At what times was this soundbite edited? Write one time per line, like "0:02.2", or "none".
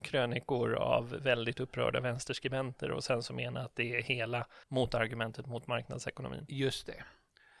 0:04.6

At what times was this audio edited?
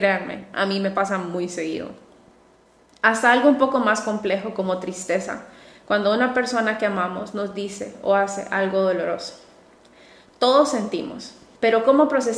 none

